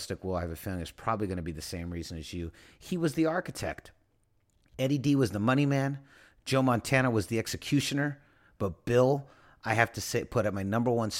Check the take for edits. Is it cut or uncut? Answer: uncut